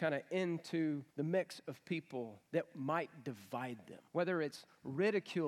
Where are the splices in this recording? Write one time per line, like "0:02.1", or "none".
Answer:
0:01.1
0:02.5
0:04.1